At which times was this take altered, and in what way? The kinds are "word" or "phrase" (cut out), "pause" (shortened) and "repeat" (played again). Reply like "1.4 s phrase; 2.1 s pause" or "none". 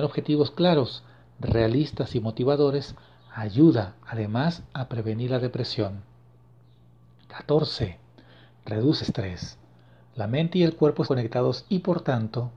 9.0 s word; 11.1 s word